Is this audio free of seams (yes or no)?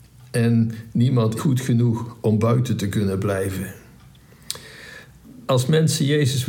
no